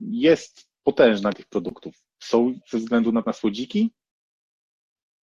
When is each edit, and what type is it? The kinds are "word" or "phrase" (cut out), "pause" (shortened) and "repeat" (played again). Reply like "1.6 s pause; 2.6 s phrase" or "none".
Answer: 1.3 s word; 2.6 s word; 3.2 s word

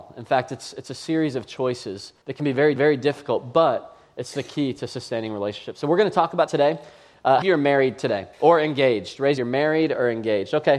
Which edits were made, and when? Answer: 2.2 s pause; 2.8 s repeat; 6.5 s word; 7.4 s phrase; 8.3 s pause; 9.4 s phrase

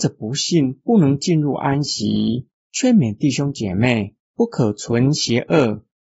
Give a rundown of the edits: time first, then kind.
4.2 s pause

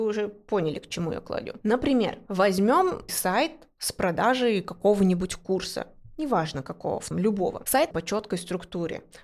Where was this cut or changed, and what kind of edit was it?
3.1 s word; 7.1 s word; 7.9 s word

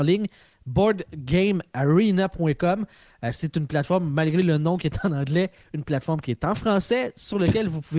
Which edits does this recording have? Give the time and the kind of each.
none

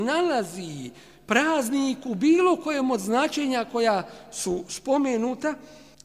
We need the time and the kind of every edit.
none

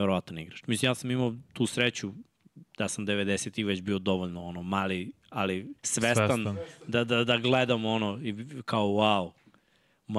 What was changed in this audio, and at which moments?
2.7 s pause; 5.8 s pause

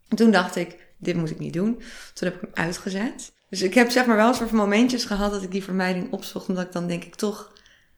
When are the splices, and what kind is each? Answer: none

